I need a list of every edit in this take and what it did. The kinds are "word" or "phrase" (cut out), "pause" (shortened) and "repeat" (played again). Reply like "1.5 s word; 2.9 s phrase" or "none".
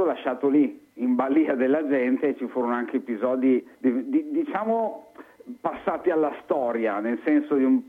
3.7 s pause